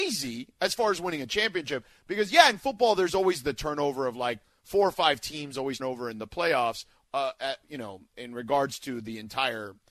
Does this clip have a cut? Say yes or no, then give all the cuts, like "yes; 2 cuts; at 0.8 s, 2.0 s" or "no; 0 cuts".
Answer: yes; 1 cut; at 5.8 s